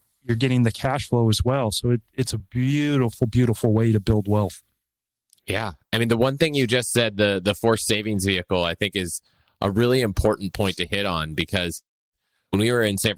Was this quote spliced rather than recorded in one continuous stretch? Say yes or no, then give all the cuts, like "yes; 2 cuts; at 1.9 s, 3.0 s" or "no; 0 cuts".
no; 0 cuts